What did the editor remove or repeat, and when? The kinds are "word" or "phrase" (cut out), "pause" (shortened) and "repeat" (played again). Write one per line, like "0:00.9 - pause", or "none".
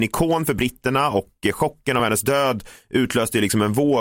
none